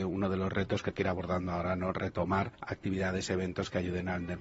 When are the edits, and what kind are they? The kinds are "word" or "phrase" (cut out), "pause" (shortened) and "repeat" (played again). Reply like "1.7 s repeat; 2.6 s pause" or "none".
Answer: 0.9 s word; 2.5 s pause